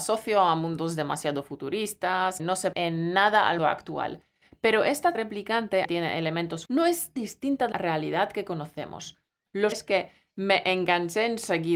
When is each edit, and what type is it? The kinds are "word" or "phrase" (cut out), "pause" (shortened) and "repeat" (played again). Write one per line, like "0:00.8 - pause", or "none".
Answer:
0:02.4 - word
0:02.7 - word
0:03.6 - word
0:05.1 - word
0:05.8 - word
0:06.7 - word
0:07.2 - word
0:07.7 - word
0:09.7 - word